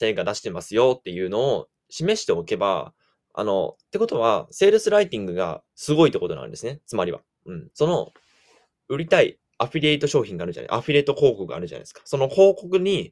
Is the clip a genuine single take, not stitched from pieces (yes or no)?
no